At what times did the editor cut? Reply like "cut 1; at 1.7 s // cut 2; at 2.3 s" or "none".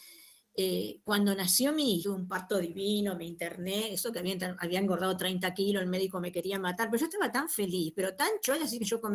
cut 1; at 2.0 s